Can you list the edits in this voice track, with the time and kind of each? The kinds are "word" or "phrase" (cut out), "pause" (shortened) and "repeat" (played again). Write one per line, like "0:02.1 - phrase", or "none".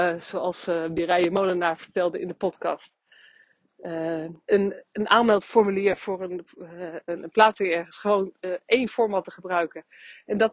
0:04.4 - pause